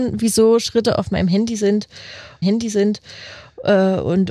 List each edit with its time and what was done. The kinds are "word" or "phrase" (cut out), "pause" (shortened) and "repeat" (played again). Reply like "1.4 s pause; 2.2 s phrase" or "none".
2.4 s repeat